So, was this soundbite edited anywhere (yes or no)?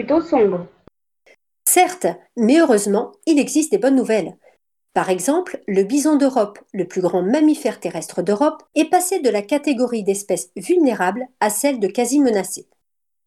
yes